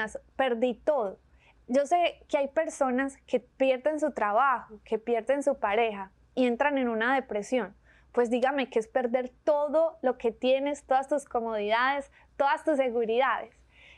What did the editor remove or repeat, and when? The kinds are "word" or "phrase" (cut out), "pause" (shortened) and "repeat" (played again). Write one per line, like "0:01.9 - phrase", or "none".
none